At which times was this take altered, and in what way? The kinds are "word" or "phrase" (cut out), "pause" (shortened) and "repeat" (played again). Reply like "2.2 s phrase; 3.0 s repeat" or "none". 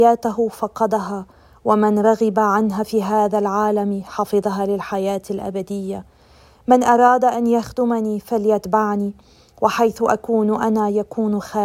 none